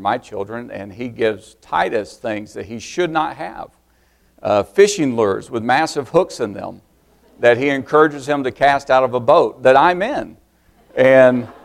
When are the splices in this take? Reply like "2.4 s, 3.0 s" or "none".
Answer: none